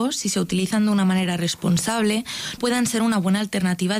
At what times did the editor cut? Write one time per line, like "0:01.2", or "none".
0:02.6